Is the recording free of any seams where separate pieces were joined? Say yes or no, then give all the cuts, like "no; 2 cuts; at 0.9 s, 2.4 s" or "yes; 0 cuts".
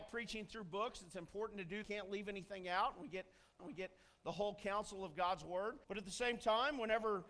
no; 3 cuts; at 1.8 s, 3.6 s, 5.8 s